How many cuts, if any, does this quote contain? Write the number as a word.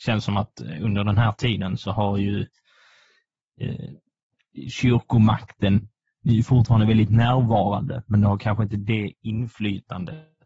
zero